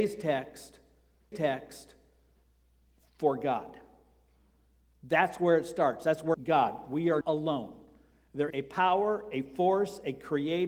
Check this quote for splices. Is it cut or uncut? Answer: cut